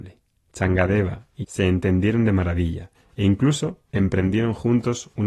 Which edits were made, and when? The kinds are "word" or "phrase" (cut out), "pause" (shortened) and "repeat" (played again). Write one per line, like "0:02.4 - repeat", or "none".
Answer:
0:01.4 - word